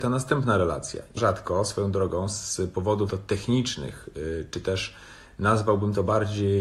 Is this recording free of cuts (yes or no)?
no